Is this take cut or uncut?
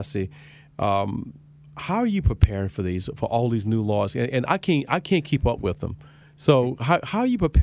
uncut